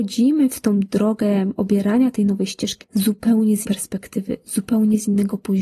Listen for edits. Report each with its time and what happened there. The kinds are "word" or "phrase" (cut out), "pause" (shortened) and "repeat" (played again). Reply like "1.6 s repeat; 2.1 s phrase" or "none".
1.6 s word; 2.8 s word; 3.6 s word

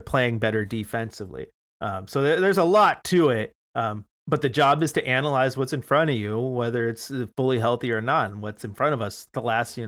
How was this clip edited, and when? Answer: none

